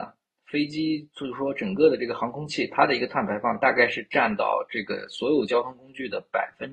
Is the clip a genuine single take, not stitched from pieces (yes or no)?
yes